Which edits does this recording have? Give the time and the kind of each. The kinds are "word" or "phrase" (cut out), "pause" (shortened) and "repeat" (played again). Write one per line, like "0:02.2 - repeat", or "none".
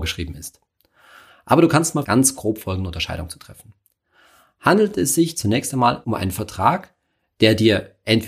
0:02.0 - word
0:06.0 - word